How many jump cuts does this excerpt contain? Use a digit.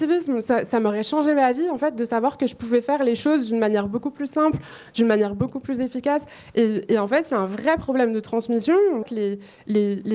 1